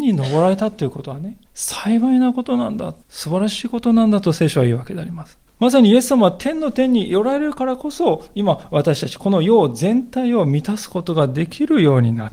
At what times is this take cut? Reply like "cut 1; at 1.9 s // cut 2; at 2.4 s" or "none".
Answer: cut 1; at 1.5 s // cut 2; at 3.0 s // cut 3; at 5.5 s